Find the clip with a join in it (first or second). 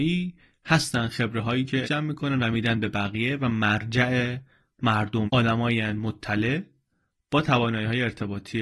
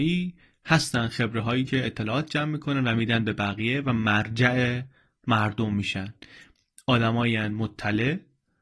first